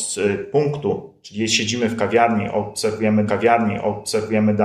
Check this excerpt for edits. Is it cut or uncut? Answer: cut